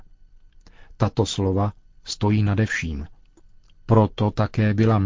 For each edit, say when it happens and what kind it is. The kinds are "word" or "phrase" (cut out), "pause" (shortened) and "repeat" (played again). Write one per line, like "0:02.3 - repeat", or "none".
none